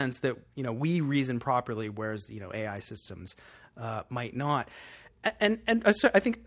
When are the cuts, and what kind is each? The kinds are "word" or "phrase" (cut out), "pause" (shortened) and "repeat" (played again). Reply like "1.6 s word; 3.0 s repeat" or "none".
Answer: none

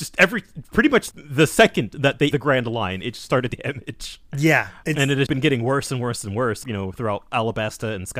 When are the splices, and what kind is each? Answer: 1.1 s word; 2.3 s word; 3.5 s word; 4.8 s word; 5.3 s word; 6.6 s word

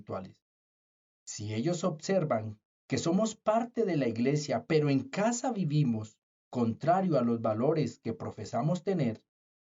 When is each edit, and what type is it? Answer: none

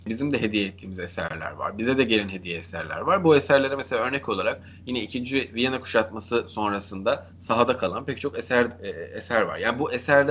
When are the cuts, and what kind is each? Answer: none

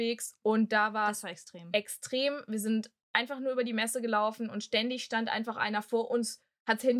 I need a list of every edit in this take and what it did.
none

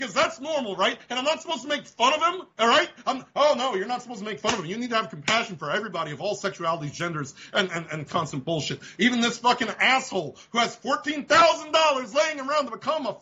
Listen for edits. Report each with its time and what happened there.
2.5 s pause

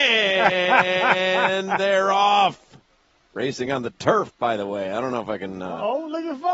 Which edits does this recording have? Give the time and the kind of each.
none

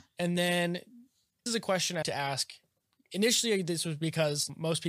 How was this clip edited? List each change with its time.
1.5 s word; 2.0 s word

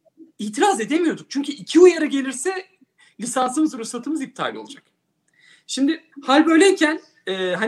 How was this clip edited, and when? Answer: 6.1 s pause

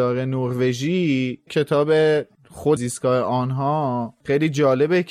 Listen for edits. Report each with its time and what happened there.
1.5 s word; 2.8 s phrase

